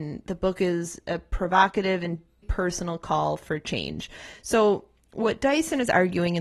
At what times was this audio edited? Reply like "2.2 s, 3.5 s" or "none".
2.4 s